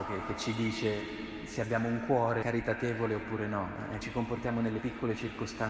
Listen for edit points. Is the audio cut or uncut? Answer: cut